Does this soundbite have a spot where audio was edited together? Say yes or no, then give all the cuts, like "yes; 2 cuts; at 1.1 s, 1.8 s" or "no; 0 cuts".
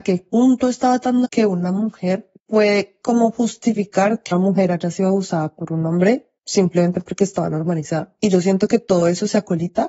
yes; 4 cuts; at 1.2 s, 2.4 s, 4.3 s, 6.4 s